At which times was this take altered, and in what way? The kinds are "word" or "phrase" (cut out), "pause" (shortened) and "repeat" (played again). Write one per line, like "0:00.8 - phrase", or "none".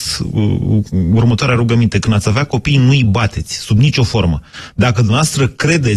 none